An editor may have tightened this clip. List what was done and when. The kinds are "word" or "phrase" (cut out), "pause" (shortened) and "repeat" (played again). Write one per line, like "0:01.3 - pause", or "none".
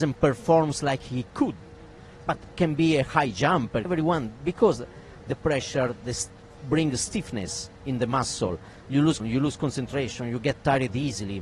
0:03.8 - phrase
0:09.2 - word

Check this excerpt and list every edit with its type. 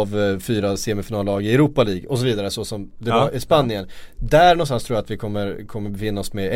none

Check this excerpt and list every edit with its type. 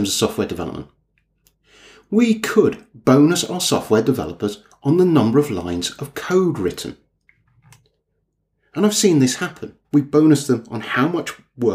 0:09.8 - pause

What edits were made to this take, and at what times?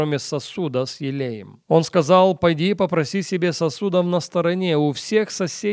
0:01.6 - pause

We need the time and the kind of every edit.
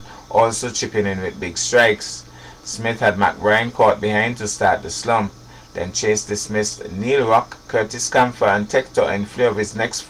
none

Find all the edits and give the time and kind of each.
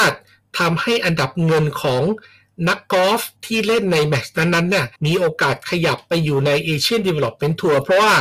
0:03.4 - pause
0:05.0 - pause

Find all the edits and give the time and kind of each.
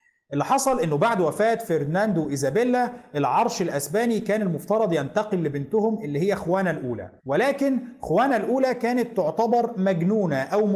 0:07.2 - pause

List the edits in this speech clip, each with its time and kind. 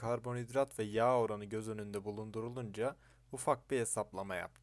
none

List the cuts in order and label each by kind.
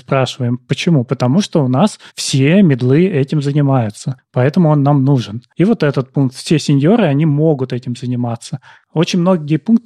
0:02.1 - pause

